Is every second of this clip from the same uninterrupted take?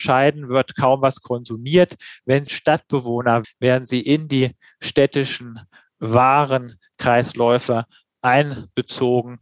no; 2 cuts; at 2.5 s, 3.4 s

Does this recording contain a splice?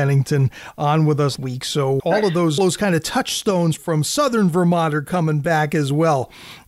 yes; 4 cuts; at 1.4 s, 2.0 s, 2.6 s, 3.8 s

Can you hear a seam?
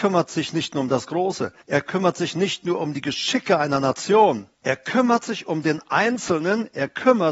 yes; 2 cuts; at 1.6 s, 4.5 s

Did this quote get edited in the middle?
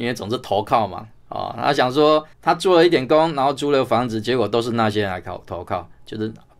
yes; 1 cut; at 2.3 s

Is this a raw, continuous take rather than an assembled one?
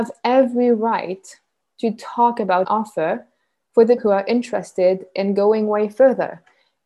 no; 2 cuts; at 2.6 s, 4.0 s

